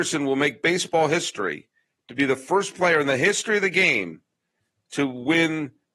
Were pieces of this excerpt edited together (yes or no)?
no